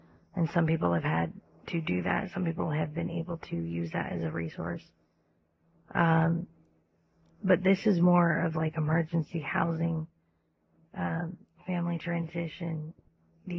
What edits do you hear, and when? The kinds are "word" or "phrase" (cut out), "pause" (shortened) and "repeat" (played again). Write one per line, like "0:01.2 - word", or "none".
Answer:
none